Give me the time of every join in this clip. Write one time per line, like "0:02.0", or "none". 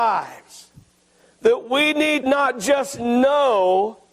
0:02.2